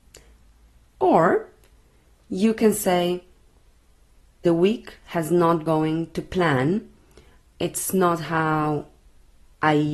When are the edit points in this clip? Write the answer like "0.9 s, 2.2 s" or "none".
4.4 s, 5.7 s